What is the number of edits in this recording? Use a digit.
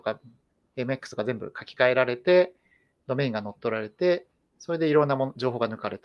0